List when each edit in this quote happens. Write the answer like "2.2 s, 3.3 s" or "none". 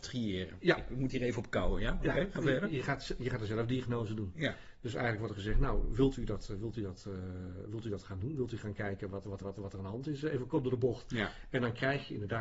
9.4 s